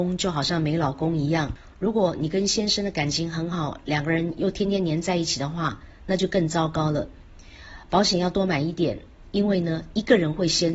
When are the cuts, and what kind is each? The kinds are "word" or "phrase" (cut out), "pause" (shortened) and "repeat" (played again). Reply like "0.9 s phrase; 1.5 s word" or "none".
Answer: none